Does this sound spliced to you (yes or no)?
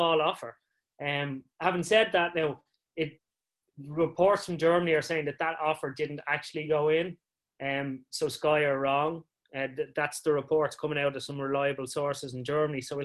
no